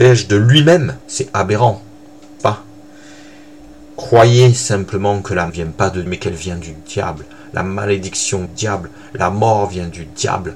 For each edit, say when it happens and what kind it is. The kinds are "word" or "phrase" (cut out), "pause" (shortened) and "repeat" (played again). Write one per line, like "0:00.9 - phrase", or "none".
0:01.0 - pause
0:02.4 - word
0:05.5 - phrase
0:06.1 - word
0:08.5 - phrase